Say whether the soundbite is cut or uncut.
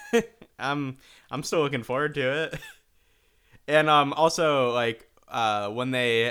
uncut